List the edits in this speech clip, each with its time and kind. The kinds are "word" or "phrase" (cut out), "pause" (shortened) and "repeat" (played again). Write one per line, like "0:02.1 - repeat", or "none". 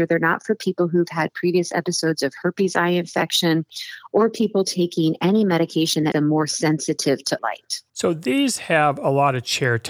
0:06.1 - word
0:07.4 - word
0:07.9 - pause